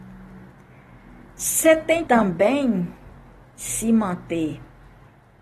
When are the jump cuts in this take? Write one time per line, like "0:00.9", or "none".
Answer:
0:02.1